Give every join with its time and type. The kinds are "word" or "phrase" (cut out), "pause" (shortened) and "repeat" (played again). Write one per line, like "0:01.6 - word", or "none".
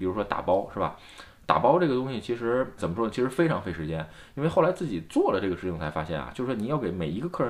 0:02.8 - word